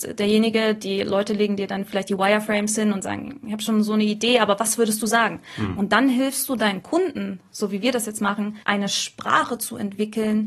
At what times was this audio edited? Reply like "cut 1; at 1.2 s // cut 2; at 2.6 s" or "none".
cut 1; at 8.6 s